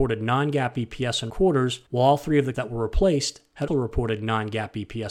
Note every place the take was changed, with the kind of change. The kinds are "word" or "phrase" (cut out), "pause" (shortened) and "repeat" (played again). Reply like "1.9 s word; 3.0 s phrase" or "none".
1.3 s word; 1.9 s pause; 2.5 s word; 3.7 s word